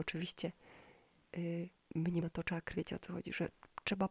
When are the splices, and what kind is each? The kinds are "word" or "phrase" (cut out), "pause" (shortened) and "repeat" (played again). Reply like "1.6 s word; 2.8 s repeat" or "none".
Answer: 2.2 s word; 2.7 s word